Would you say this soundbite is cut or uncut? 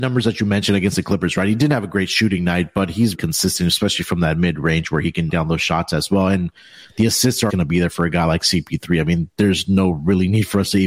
cut